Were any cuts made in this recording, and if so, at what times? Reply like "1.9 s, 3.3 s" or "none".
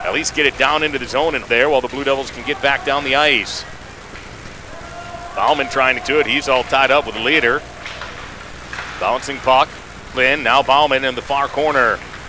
1.4 s, 6.0 s, 10.1 s